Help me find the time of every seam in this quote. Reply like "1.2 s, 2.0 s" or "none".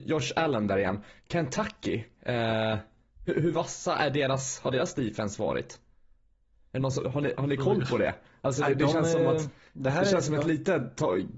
none